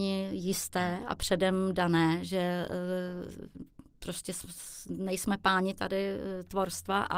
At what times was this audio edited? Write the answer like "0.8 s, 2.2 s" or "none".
none